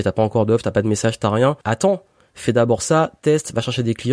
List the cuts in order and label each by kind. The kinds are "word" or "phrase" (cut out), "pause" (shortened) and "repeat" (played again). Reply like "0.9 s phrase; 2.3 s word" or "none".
1.6 s pause